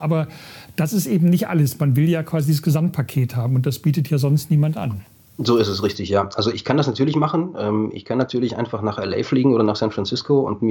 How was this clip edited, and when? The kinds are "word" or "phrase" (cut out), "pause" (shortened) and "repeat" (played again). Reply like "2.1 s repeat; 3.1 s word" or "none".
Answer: none